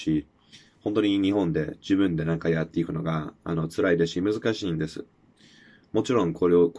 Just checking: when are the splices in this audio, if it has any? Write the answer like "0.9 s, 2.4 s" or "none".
none